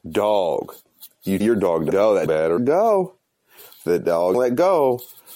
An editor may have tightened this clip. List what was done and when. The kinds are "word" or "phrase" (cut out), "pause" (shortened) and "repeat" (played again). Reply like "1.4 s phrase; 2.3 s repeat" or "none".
1.4 s word; 1.9 s word; 2.3 s word; 2.6 s word; 4.3 s word